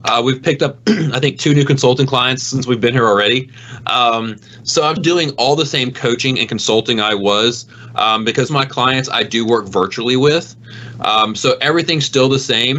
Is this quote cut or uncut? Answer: cut